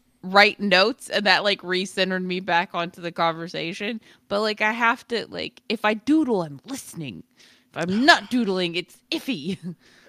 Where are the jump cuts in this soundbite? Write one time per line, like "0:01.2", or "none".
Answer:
none